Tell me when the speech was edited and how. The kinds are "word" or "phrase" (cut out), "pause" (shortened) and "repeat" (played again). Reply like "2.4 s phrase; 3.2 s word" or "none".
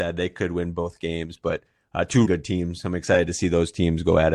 2.2 s word